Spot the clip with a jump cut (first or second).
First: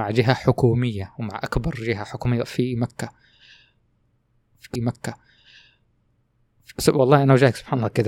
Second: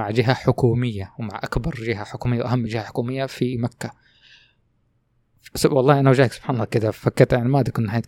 first